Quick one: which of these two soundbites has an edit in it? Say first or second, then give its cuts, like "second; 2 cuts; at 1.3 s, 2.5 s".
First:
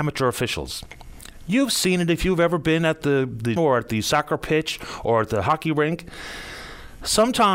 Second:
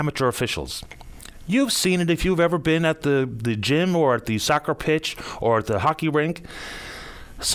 first; 1 cut; at 3.6 s